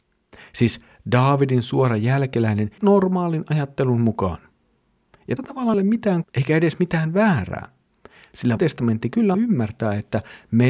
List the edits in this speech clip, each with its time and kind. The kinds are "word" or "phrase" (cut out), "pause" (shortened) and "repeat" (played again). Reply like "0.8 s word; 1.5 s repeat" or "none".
2.8 s word; 5.4 s word; 5.7 s word; 6.2 s word; 8.6 s word; 9.3 s word